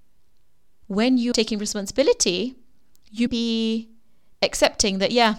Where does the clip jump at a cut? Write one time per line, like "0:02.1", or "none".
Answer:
0:01.3
0:03.3